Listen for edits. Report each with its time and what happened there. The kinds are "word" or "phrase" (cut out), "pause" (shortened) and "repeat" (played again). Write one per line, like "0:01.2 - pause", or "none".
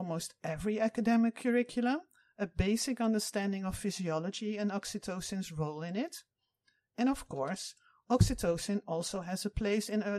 none